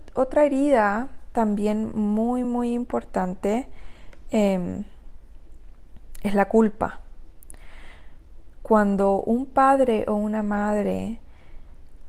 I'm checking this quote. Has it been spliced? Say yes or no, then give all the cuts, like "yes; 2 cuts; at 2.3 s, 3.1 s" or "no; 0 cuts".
no; 0 cuts